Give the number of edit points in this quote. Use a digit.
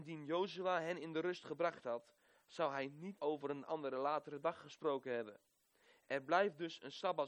1